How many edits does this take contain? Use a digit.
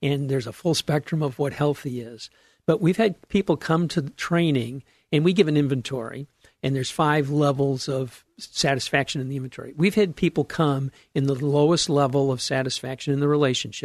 0